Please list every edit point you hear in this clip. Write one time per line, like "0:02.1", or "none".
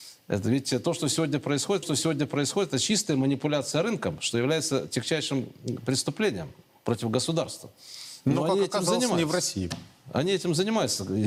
0:01.8